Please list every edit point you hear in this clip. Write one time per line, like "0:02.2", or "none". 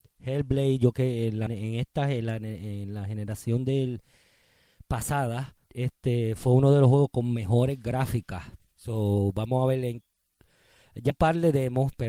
0:00.9
0:01.5
0:05.6
0:08.6
0:11.1